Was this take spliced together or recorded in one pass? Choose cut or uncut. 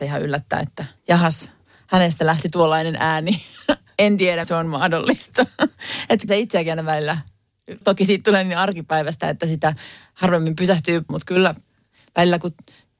cut